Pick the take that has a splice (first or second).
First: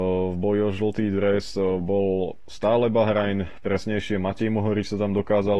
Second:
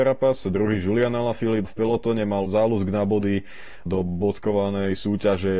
second